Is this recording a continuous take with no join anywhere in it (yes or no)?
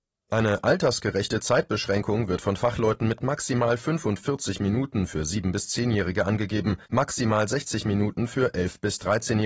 no